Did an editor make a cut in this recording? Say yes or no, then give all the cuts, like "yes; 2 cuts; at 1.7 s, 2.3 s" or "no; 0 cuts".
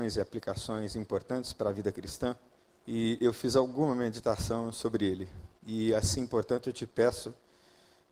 yes; 2 cuts; at 2.6 s, 5.6 s